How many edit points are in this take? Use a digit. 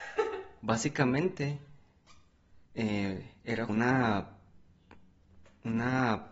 2